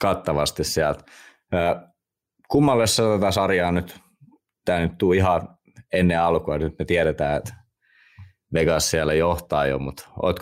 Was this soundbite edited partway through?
no; 0 cuts

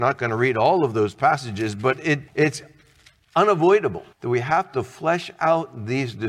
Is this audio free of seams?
no; 2 cuts; at 2.3 s, 4.1 s

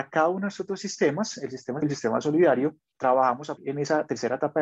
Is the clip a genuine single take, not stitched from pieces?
no; 3 cuts; at 1.8 s, 2.9 s, 3.6 s

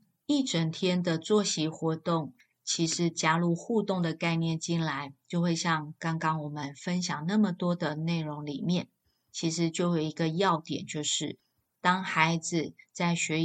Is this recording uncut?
yes; 0 cuts

